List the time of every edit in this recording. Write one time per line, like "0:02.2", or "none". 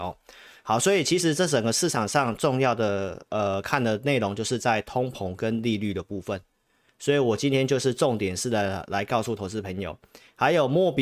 none